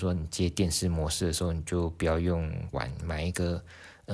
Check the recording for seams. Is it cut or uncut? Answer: cut